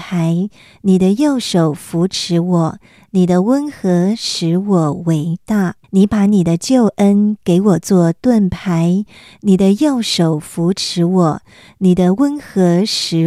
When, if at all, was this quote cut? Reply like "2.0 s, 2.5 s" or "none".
5.8 s